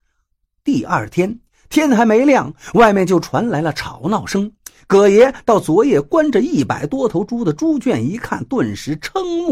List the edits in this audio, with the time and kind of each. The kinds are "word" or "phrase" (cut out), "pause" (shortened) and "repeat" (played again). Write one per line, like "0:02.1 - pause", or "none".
none